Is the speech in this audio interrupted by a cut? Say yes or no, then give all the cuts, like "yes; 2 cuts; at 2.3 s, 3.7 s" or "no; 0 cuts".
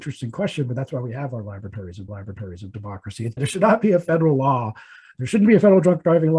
yes; 2 cuts; at 2.1 s, 3.4 s